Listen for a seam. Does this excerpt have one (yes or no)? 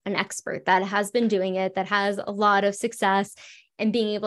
no